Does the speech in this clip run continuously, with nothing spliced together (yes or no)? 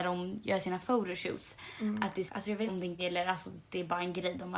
no